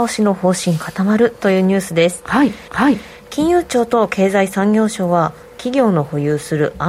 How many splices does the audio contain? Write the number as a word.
one